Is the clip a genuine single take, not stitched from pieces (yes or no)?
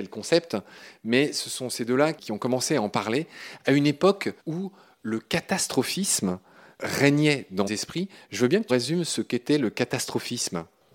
no